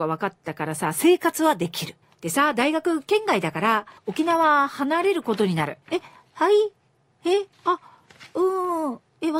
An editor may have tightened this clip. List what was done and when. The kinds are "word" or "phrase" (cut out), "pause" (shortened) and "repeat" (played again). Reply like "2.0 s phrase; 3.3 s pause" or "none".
2.0 s pause; 4.0 s pause; 5.8 s pause; 7.5 s pause